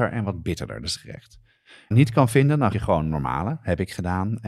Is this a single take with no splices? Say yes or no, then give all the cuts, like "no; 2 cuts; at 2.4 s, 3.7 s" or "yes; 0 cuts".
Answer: no; 3 cuts; at 1.0 s, 1.9 s, 2.7 s